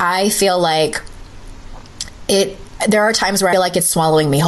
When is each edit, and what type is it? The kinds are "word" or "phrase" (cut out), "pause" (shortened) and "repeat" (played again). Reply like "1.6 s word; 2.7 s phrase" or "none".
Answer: 3.5 s phrase